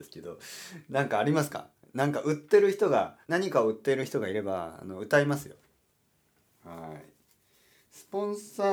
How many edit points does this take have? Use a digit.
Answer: 1